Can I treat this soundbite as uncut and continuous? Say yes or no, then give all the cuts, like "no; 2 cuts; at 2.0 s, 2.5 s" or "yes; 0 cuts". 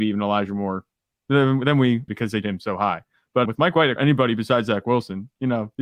no; 4 cuts; at 2.1 s, 2.4 s, 3.5 s, 4.0 s